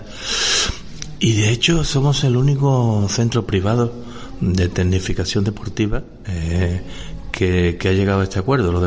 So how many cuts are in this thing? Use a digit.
0